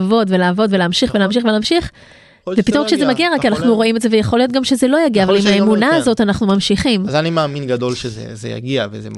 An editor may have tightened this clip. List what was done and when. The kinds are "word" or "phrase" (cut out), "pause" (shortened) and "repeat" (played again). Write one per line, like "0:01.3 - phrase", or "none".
none